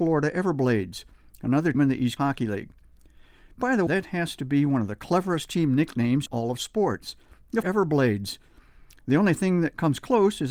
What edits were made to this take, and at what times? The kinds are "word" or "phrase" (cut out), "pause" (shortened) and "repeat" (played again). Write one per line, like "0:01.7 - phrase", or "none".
0:01.7 - word
0:02.2 - word
0:03.9 - word
0:06.3 - word
0:07.6 - word